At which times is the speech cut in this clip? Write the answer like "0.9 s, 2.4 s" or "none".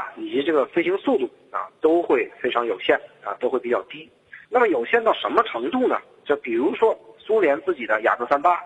4.4 s

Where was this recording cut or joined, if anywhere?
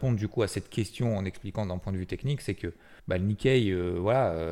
3.0 s

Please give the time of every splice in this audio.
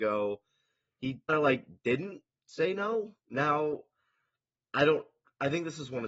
1.3 s, 3.2 s

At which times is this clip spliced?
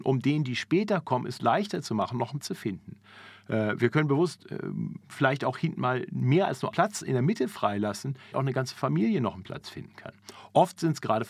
2.4 s, 6.7 s, 8.3 s

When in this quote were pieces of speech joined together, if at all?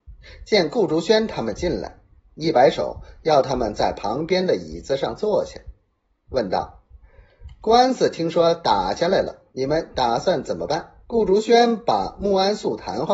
9.5 s, 11.0 s

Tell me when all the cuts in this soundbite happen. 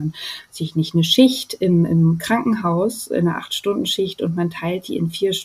none

